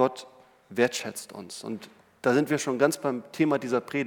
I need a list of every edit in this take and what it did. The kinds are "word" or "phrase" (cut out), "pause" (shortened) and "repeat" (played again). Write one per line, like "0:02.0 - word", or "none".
none